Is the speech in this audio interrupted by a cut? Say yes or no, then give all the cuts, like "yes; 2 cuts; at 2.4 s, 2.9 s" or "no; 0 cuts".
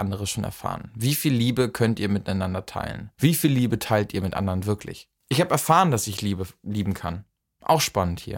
yes; 2 cuts; at 3.1 s, 5.2 s